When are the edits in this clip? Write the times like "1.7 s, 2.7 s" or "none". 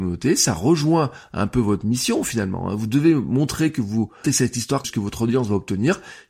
4.2 s, 4.8 s